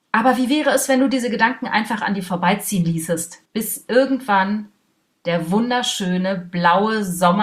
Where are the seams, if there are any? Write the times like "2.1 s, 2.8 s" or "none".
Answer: 3.5 s